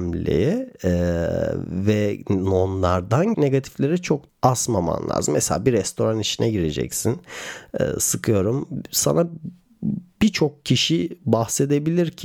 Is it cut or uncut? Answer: cut